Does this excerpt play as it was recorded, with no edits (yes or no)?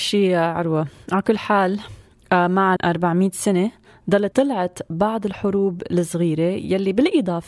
no